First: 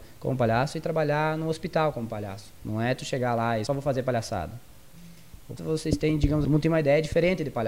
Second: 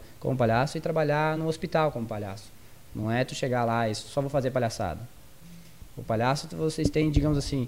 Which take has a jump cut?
first; 4 cuts; at 2.5 s, 3.7 s, 5.6 s, 6.4 s

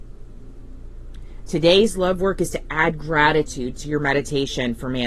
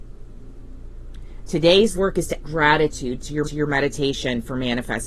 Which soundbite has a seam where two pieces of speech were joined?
second; 3 cuts; at 1.9 s, 2.4 s, 3.4 s

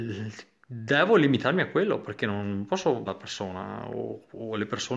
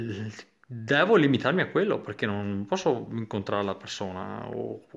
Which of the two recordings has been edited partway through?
first; 1 cut; at 3.1 s

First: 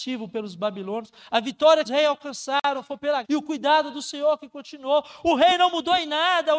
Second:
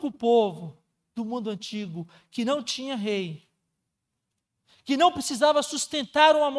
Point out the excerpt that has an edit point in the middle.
first; 2 cuts; at 1.9 s, 3.2 s

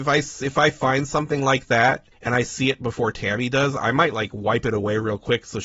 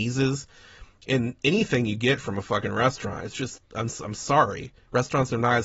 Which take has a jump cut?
first; 1 cut; at 2.1 s

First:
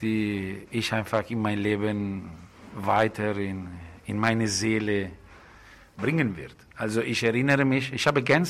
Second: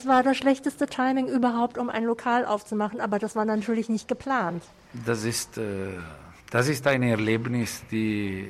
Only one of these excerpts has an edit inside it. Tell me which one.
second; 1 cut; at 6.4 s

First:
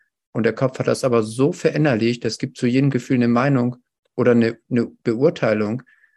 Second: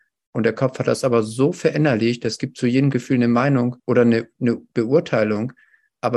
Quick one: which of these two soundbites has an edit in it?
second; 1 cut; at 3.8 s

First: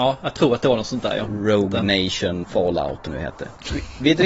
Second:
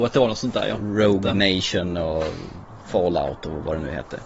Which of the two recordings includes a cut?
first; 2 cuts; at 2.4 s, 3.1 s

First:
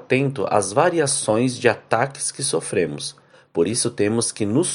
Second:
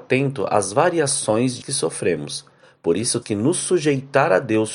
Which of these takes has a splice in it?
second; 2 cuts; at 1.6 s, 3.2 s

